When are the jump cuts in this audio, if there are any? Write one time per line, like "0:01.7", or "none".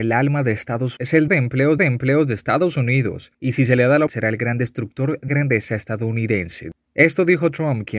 0:01.0
0:01.3
0:01.8
0:03.3
0:04.1
0:05.3

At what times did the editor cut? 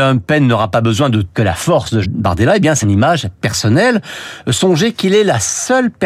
0:01.3
0:02.0
0:02.8

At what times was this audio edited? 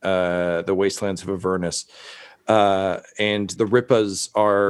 0:03.6

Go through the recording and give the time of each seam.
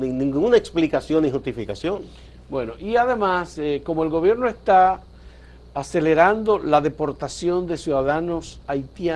none

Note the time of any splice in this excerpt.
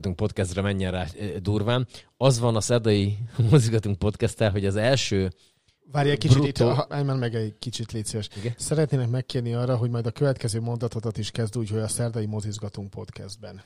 0:06.9

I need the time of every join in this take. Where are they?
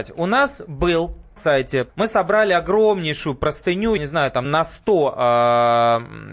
0:01.4
0:01.9
0:04.0
0:04.4

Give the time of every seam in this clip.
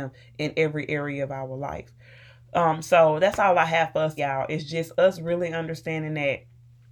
0:04.2

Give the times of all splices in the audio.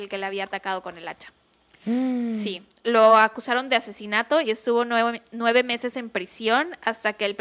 none

